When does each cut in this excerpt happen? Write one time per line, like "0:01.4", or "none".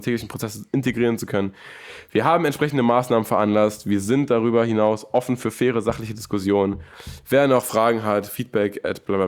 none